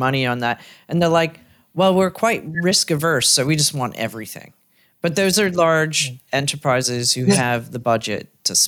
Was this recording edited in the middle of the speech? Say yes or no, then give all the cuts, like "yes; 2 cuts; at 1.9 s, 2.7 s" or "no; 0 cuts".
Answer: no; 0 cuts